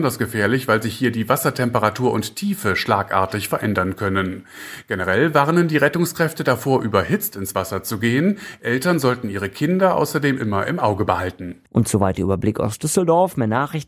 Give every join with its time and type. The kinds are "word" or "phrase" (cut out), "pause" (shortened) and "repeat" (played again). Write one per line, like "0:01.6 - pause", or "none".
0:11.7 - pause